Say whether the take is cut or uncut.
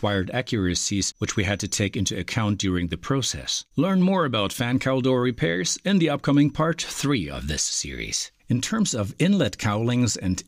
cut